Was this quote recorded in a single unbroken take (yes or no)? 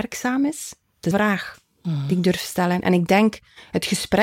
no